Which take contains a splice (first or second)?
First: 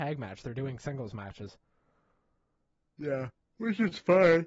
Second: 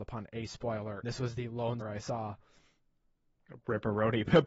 second